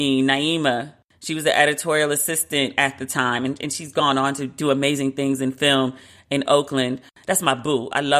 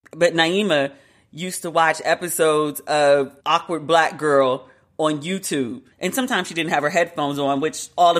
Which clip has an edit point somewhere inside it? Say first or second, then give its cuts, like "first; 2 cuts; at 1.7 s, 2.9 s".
second; 2 cuts; at 3.4 s, 5.9 s